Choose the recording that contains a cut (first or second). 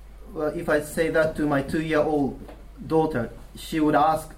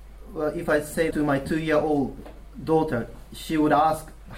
second